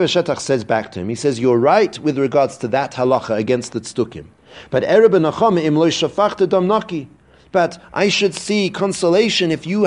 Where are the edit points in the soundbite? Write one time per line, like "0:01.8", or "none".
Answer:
none